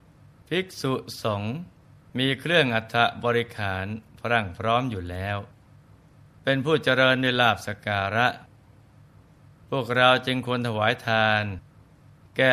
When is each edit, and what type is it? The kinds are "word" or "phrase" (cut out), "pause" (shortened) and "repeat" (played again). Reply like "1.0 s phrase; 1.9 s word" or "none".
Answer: none